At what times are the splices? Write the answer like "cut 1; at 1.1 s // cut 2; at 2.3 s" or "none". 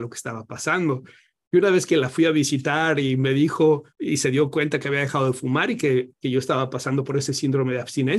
cut 1; at 3.9 s